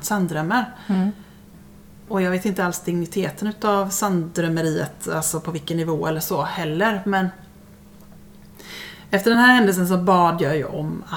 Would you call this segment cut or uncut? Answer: uncut